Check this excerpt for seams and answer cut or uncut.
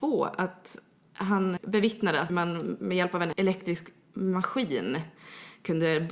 cut